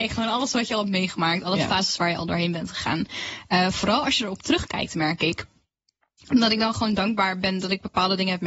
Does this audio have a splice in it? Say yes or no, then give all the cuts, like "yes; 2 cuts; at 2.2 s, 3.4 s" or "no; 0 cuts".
no; 0 cuts